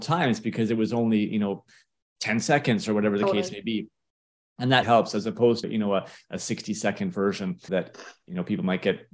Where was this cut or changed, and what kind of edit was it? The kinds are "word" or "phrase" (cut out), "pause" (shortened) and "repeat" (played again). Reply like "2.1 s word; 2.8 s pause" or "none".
4.8 s word; 5.6 s word; 7.7 s word